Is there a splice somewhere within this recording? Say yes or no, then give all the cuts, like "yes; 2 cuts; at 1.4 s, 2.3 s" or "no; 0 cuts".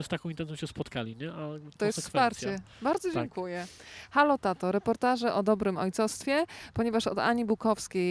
yes; 1 cut; at 1.8 s